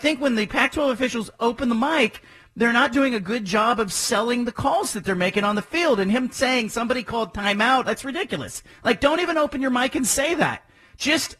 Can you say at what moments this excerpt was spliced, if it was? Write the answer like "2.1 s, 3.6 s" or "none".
none